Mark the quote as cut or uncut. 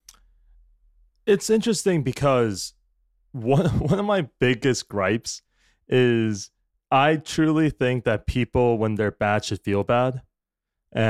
uncut